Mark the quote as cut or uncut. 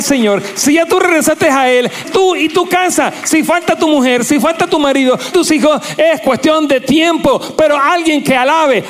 cut